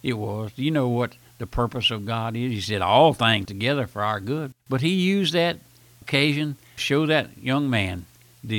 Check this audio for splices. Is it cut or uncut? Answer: cut